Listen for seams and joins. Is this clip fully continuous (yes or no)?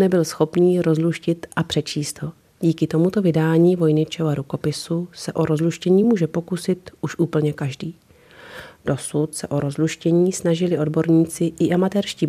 yes